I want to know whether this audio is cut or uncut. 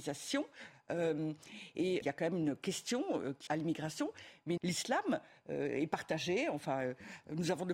cut